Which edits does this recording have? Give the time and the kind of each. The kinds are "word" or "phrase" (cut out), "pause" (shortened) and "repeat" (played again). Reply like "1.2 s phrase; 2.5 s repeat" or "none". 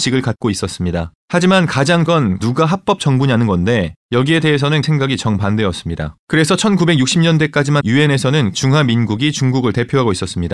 1.2 s pause; 2.1 s word; 2.4 s word; 4.0 s pause; 4.8 s word; 6.2 s pause; 7.8 s word; 8.5 s word